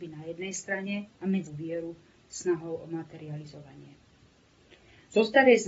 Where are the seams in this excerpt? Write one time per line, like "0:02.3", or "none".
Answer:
0:01.1
0:01.5